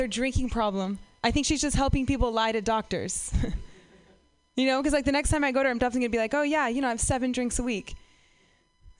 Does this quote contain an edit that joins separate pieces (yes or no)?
no